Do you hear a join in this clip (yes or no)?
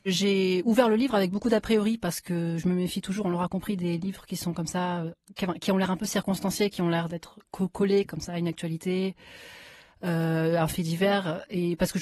no